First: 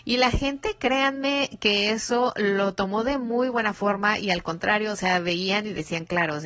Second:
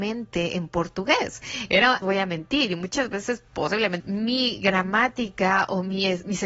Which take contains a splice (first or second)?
second